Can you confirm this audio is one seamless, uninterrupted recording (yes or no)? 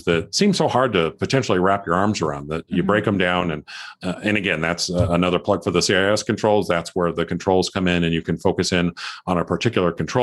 yes